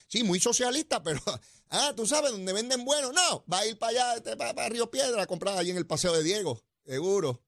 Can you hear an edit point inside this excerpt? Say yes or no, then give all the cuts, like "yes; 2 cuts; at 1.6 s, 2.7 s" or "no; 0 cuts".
no; 0 cuts